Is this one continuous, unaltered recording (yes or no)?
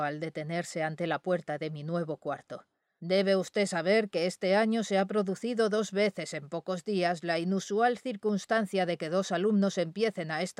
yes